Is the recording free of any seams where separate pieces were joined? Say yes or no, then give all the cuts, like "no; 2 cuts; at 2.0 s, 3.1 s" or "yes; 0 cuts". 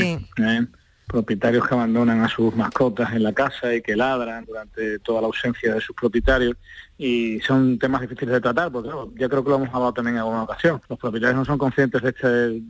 no; 1 cut; at 10.9 s